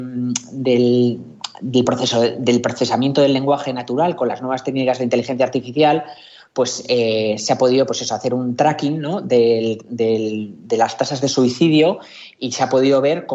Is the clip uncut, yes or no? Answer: yes